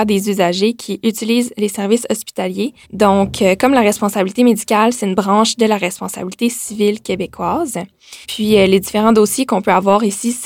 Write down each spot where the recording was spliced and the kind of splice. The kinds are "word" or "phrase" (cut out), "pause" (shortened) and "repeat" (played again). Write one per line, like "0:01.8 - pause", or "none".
0:02.8 - pause
0:08.2 - pause